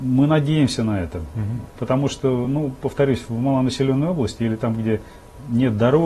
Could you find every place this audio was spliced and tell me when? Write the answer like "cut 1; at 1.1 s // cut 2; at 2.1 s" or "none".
none

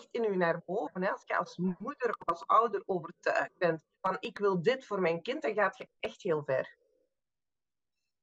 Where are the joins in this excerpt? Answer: cut 1; at 3.9 s

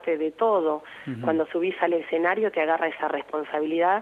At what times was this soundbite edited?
none

